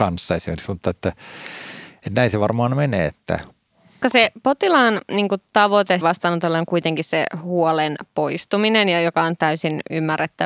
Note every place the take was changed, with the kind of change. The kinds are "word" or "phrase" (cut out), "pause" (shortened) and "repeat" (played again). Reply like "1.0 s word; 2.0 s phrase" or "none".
4.0 s word; 6.0 s word